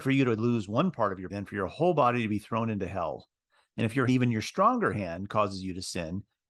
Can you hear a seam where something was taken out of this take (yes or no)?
yes